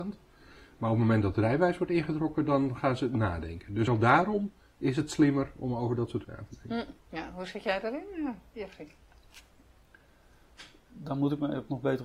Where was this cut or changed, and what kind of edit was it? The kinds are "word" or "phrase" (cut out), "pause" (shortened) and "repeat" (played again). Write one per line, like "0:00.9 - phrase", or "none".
0:03.9 - word
0:06.2 - word
0:07.0 - pause